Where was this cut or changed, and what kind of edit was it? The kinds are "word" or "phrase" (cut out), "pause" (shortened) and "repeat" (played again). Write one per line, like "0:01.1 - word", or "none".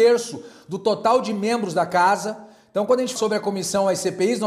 0:03.2 - word

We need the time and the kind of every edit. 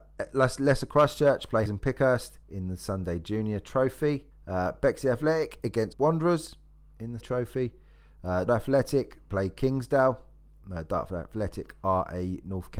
0:01.7 - word
0:02.4 - pause
0:04.3 - pause
0:05.9 - word
0:07.2 - word
0:08.5 - word

